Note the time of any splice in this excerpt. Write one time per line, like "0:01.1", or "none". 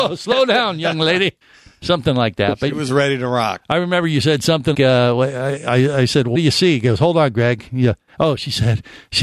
0:01.4
0:04.7
0:06.3